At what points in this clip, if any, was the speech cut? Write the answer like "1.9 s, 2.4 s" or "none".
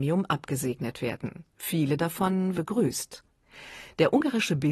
1.5 s, 2.5 s